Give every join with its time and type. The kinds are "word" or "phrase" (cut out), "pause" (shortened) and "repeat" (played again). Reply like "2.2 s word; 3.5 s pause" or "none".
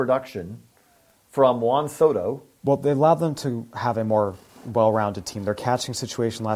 none